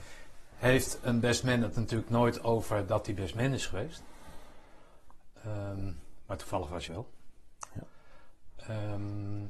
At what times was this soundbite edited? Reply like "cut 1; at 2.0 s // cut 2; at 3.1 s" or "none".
cut 1; at 6.9 s

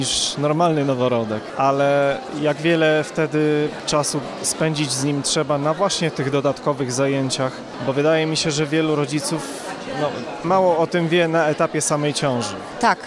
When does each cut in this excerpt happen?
cut 1; at 10.4 s

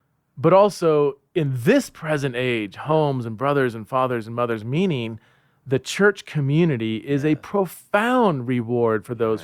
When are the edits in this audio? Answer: none

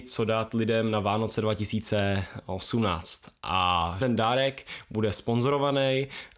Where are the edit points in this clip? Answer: cut 1; at 4.0 s

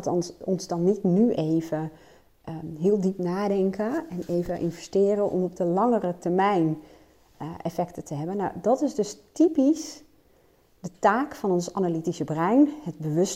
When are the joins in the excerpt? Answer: none

